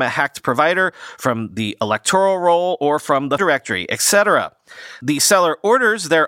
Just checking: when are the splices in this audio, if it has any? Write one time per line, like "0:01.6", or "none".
0:03.4